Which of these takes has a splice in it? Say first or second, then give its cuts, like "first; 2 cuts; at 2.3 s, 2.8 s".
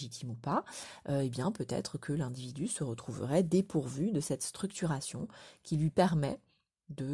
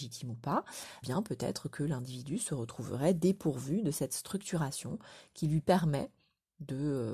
second; 1 cut; at 1.0 s